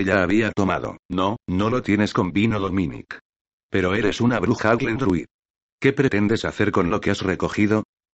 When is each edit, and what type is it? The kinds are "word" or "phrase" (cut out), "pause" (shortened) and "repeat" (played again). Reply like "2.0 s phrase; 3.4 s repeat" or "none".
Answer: 1.0 s pause

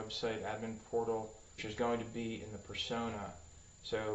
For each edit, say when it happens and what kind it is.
1.6 s word

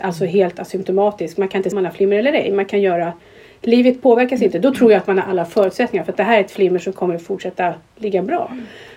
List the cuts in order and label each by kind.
1.7 s word

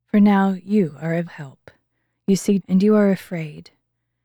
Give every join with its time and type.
1.3 s word; 2.6 s word

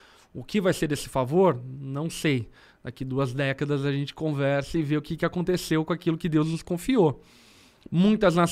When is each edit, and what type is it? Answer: none

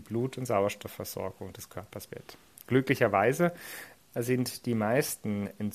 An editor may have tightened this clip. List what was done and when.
2.1 s word

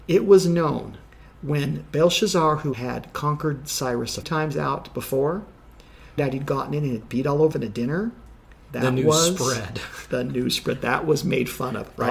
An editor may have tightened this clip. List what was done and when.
4.2 s word; 6.2 s word; 7.5 s word

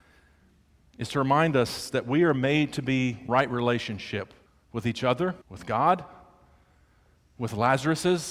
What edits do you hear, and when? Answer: 3.3 s word; 4.5 s pause; 5.4 s pause

